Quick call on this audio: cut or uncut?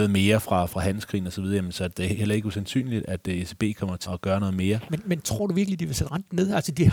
cut